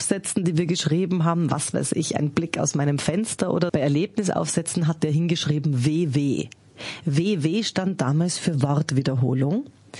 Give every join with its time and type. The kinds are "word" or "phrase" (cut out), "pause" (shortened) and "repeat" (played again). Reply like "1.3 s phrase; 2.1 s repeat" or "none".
3.7 s word